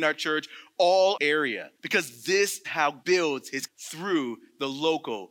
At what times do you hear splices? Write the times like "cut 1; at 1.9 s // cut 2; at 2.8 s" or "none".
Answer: cut 1; at 1.2 s // cut 2; at 1.7 s // cut 3; at 2.6 s // cut 4; at 3.0 s // cut 5; at 3.7 s